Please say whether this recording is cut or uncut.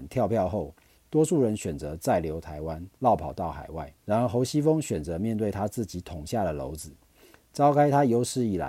cut